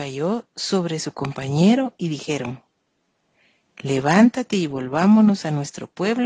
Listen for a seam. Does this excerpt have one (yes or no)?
no